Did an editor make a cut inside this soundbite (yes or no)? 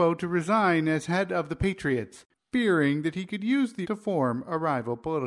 yes